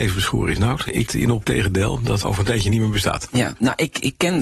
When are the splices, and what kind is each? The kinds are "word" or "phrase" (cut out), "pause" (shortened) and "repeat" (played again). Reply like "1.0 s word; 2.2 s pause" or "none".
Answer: 1.1 s word; 1.4 s word; 2.2 s word